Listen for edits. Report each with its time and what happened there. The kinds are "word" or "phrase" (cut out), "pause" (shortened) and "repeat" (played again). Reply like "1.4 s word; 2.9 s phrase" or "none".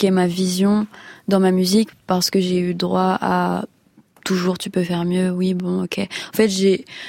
none